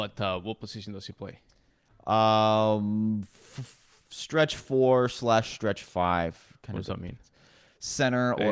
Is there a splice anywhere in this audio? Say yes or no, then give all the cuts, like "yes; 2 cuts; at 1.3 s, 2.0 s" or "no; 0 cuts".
no; 0 cuts